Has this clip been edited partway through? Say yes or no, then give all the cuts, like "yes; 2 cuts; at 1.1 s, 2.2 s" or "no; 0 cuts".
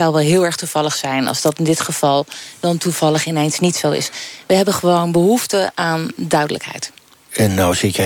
no; 0 cuts